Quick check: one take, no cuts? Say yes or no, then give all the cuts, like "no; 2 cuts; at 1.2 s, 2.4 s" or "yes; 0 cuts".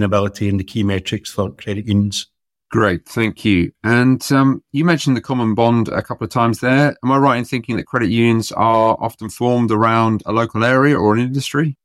yes; 0 cuts